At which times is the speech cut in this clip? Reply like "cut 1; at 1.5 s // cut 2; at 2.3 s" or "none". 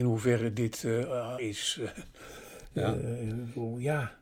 cut 1; at 1.4 s